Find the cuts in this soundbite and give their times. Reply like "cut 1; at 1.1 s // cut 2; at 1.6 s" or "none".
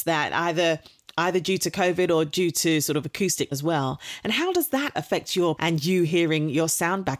cut 1; at 3.5 s // cut 2; at 5.6 s